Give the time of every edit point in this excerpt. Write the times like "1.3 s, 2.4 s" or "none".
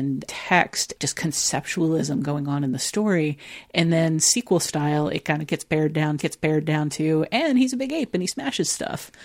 0.9 s, 6.2 s